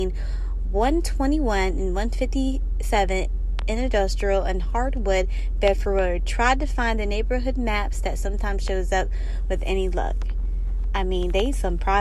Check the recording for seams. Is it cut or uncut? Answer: uncut